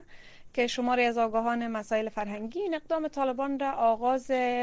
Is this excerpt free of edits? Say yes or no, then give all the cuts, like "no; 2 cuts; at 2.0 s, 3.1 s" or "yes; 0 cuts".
yes; 0 cuts